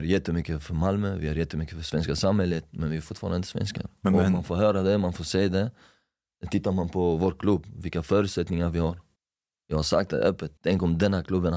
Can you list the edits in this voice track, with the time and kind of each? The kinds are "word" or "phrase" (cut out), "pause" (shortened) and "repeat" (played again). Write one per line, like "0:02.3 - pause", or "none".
0:09.2 - pause
0:10.6 - pause